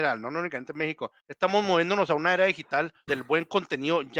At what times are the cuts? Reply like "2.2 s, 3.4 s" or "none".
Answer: 1.2 s, 3.1 s